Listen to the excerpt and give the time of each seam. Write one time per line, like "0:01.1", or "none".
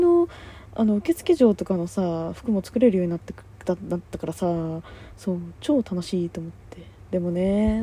0:03.5